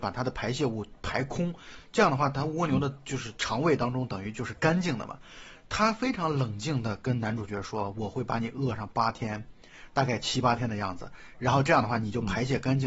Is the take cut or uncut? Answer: uncut